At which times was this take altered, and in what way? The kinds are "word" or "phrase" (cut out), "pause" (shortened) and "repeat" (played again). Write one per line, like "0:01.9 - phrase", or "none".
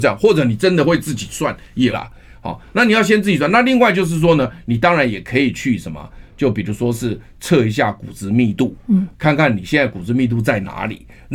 0:01.9 - word
0:09.1 - word